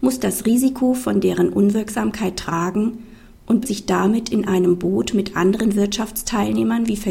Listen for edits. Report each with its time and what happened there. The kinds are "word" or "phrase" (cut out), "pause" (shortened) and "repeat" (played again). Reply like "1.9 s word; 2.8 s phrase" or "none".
3.6 s word

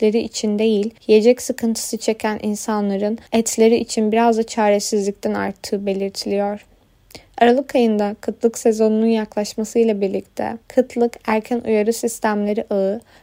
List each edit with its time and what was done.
1.0 s pause; 3.3 s pause; 10.6 s pause

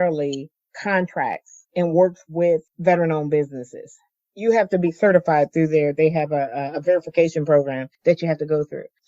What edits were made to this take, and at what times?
none

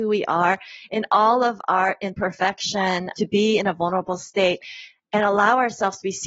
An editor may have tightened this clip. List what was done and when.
3.1 s word

